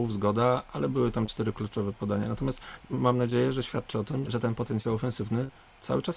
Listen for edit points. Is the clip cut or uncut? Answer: cut